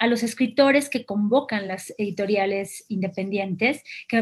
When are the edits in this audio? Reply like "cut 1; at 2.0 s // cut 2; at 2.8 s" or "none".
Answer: none